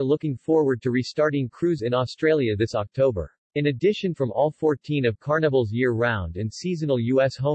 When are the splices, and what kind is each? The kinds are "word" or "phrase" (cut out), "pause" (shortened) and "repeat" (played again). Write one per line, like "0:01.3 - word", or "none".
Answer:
0:01.8 - word
0:03.4 - pause
0:04.1 - phrase